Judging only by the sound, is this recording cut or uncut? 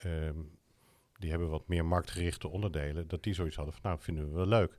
uncut